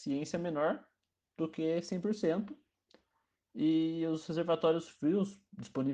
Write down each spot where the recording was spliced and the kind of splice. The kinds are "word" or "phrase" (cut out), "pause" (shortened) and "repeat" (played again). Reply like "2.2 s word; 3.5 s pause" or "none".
none

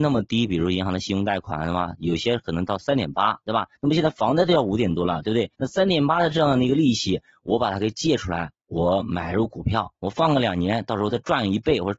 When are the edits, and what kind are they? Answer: 3.8 s pause; 5.5 s pause; 9.9 s pause

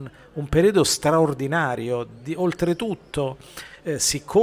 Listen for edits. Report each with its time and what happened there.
none

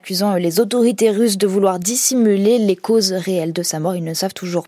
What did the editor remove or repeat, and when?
none

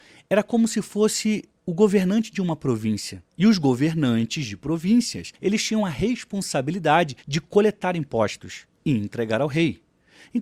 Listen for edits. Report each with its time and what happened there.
3.3 s pause; 5.3 s pause; 7.2 s pause

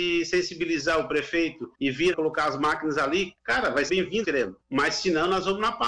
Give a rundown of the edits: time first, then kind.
1.7 s pause; 2.1 s phrase; 3.9 s word; 4.2 s phrase; 4.6 s pause

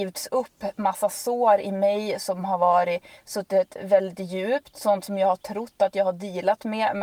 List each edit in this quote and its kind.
none

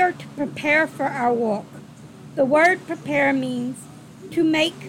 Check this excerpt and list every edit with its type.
none

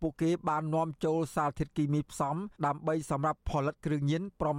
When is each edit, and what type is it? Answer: 2.5 s pause

